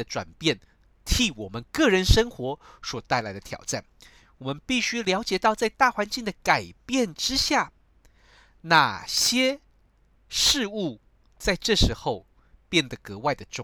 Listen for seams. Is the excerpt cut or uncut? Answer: uncut